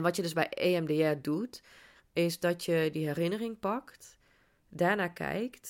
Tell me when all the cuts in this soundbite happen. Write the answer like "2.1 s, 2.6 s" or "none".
none